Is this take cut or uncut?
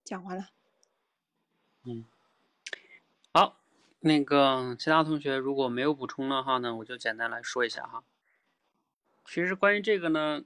uncut